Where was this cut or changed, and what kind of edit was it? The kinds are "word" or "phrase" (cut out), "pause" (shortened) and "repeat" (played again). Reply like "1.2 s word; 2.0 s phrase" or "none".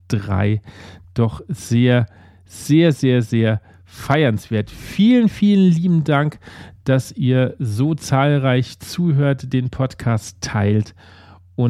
none